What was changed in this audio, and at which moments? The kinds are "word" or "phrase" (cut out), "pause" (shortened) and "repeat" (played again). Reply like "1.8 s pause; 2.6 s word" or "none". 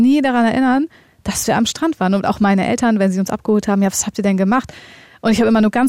none